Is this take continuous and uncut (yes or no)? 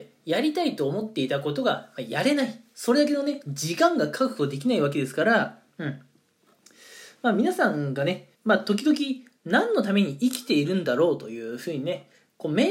no